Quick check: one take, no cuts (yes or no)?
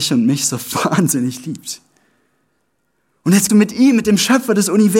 no